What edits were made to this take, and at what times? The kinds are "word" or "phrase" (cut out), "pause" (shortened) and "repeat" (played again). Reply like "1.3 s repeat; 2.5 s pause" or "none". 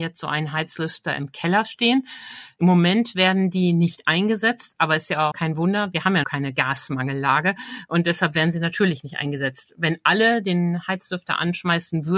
5.3 s word; 6.2 s word